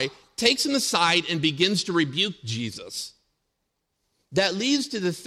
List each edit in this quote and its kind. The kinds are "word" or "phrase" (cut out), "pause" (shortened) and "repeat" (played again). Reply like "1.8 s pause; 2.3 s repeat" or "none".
none